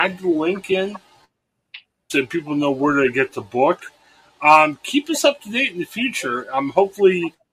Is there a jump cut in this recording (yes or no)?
no